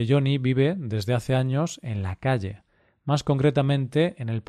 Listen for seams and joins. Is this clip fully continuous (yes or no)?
yes